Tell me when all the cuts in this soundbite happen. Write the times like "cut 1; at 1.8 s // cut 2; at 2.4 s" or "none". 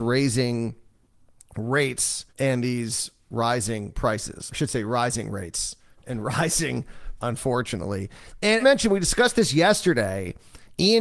cut 1; at 2.3 s // cut 2; at 4.5 s // cut 3; at 7.2 s // cut 4; at 8.6 s